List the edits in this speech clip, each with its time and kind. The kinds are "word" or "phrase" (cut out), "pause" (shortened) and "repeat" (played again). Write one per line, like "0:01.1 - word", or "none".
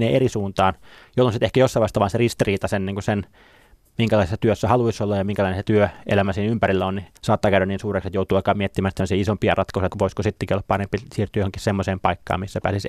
0:07.2 - pause
0:09.9 - word